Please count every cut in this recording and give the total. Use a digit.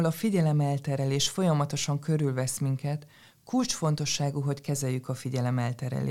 0